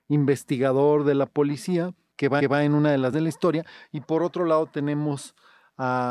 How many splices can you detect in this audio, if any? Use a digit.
2